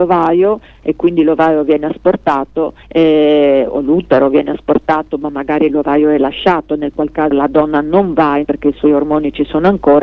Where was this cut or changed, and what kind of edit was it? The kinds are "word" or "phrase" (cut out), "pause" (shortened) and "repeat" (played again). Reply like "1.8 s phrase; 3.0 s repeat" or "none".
2.8 s pause; 7.3 s word; 8.4 s word